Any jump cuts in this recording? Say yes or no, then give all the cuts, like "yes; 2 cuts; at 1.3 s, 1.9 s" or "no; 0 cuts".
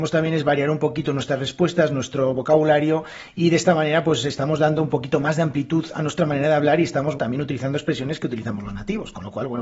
yes; 1 cut; at 7.2 s